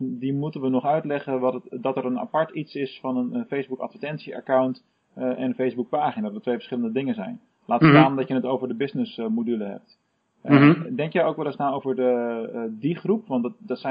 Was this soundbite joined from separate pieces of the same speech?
no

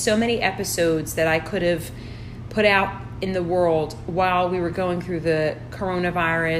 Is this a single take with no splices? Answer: yes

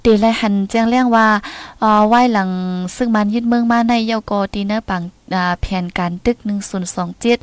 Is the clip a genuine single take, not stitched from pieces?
yes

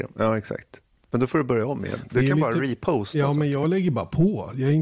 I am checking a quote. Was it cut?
no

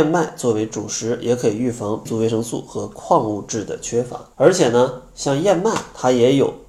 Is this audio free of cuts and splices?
no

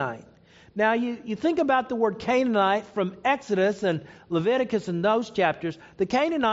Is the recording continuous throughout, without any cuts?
yes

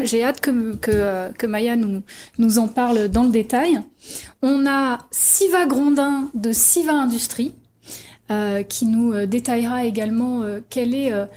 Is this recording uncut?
yes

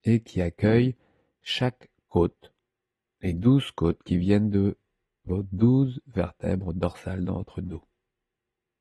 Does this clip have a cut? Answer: no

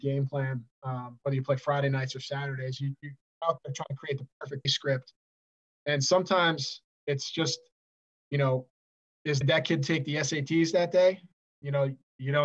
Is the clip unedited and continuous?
no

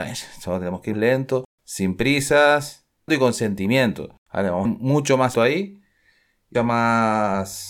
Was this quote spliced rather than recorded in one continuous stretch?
yes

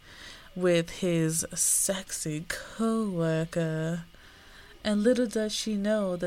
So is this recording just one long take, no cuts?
yes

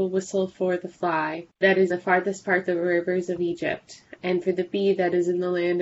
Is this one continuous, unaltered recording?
no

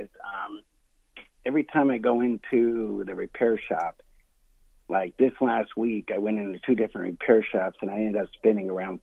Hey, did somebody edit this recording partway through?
no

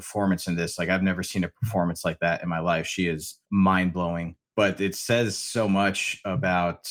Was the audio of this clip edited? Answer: no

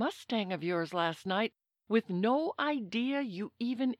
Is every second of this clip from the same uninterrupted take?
yes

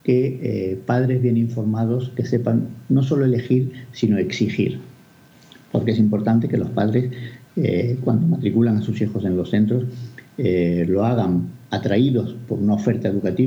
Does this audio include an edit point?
no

